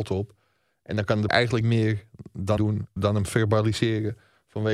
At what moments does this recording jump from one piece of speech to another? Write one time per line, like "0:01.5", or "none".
0:01.3
0:01.6
0:02.6
0:03.0